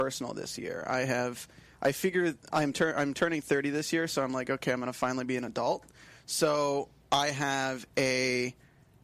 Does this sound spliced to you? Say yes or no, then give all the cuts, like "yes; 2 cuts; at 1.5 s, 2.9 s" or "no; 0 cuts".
no; 0 cuts